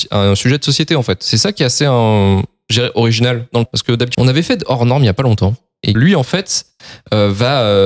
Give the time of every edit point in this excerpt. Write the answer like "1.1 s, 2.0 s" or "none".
3.7 s, 4.1 s, 5.9 s

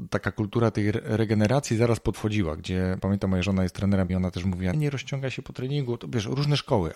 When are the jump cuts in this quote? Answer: 2.1 s, 3.0 s, 4.1 s, 4.7 s

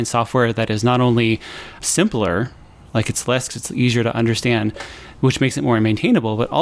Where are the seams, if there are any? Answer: 1.8 s, 3.5 s

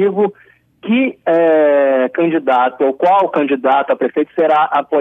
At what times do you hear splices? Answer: none

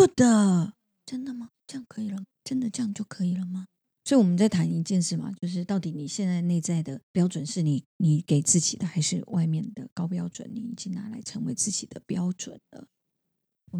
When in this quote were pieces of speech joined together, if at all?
1.6 s, 2.3 s, 3.8 s, 7.0 s, 7.9 s

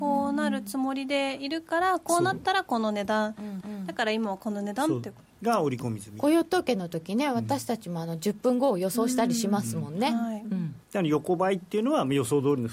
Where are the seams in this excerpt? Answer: 3.6 s, 5.3 s, 10.8 s

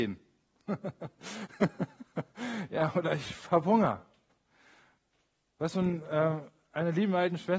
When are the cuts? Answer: none

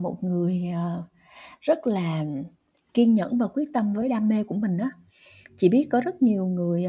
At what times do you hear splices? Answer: none

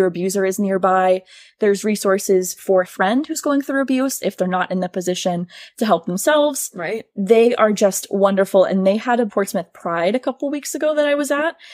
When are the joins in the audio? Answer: 2.8 s, 9.3 s

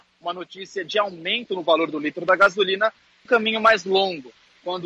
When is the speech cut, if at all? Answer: 3.3 s

